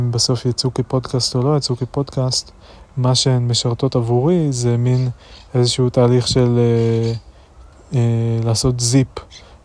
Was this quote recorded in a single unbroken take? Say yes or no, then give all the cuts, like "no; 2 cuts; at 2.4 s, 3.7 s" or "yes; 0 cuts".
no; 1 cut; at 7.7 s